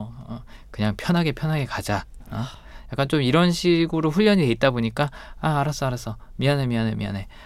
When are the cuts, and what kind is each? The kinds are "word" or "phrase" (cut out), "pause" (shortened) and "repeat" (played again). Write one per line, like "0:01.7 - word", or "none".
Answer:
none